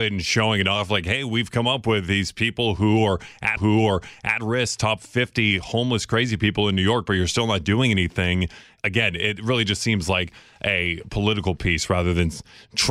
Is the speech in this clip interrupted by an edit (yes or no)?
yes